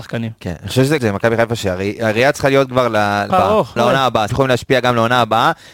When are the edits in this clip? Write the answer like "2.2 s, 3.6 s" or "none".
1.0 s, 3.3 s, 3.8 s, 4.3 s